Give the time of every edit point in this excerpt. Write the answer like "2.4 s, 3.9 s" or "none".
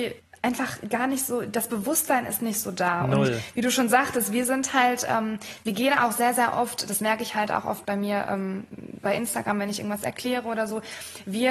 none